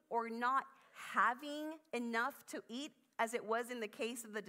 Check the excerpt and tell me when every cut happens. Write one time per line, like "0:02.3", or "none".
none